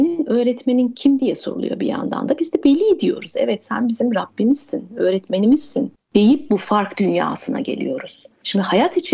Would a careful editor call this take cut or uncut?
uncut